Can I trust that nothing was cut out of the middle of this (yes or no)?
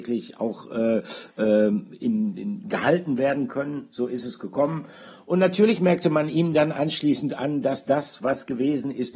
yes